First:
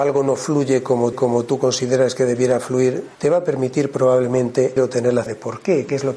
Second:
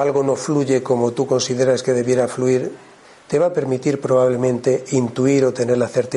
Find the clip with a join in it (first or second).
first